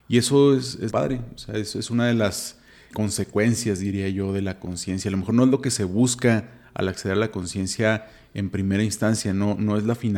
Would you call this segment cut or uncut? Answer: cut